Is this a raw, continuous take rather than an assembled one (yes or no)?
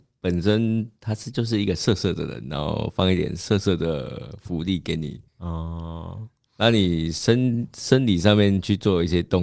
no